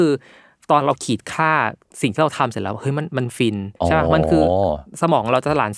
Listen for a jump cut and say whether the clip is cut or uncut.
cut